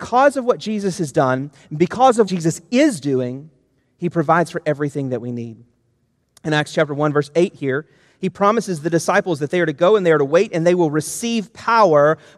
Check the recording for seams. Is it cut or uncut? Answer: cut